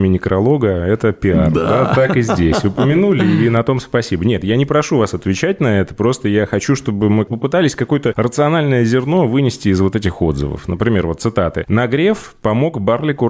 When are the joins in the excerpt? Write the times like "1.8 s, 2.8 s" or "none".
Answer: none